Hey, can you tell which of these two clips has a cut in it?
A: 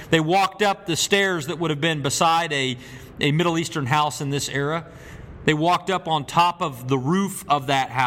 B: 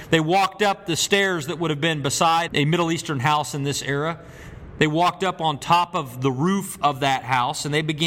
B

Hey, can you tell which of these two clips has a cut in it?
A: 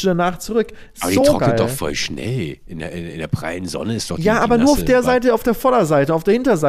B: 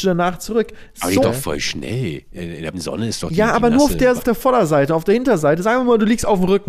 B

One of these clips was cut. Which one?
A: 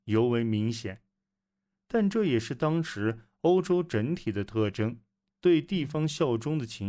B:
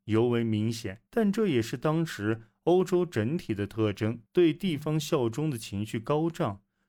B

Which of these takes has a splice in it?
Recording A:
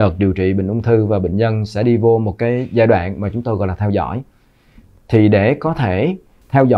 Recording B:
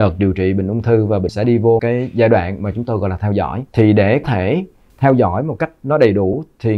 B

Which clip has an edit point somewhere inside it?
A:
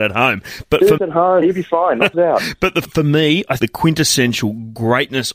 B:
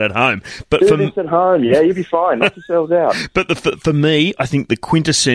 A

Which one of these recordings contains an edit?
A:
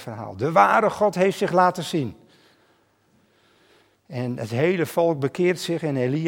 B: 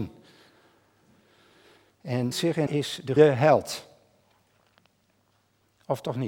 B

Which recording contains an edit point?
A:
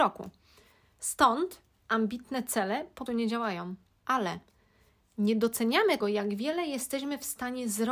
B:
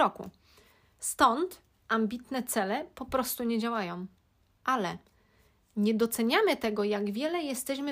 A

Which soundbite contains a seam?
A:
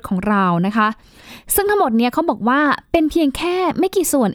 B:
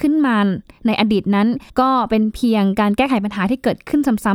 B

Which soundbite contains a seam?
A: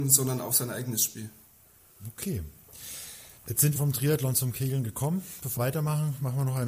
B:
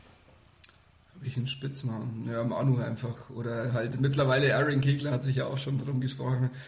A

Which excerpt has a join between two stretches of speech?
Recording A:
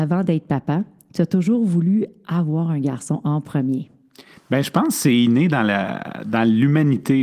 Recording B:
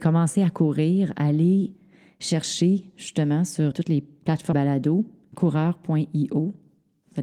B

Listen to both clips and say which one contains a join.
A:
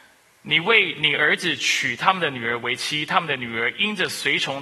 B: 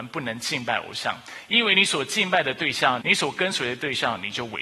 B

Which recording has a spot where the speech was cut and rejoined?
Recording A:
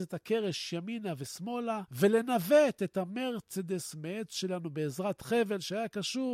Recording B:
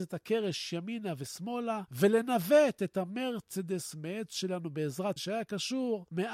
B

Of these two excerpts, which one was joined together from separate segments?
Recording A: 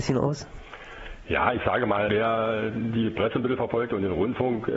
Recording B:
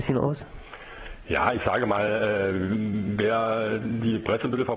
A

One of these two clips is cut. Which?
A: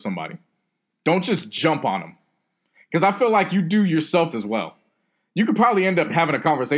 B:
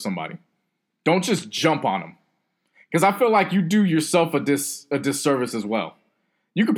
A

